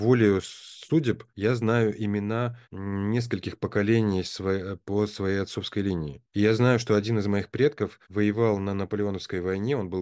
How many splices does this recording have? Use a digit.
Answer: 4